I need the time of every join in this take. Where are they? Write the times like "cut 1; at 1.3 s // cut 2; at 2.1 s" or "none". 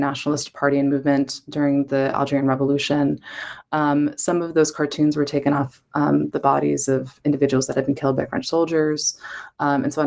none